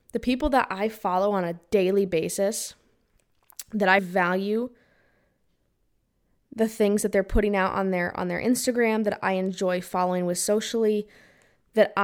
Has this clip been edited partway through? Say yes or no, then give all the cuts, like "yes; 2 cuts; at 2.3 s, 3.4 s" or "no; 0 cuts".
yes; 1 cut; at 4.0 s